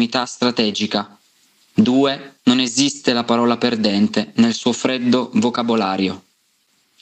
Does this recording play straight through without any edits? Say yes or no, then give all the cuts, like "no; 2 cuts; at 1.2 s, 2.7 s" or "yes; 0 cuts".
no; 1 cut; at 2.4 s